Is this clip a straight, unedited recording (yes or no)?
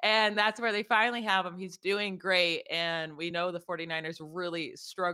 yes